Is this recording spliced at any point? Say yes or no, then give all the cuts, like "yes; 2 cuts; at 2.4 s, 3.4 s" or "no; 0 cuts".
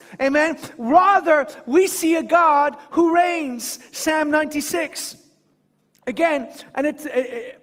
no; 0 cuts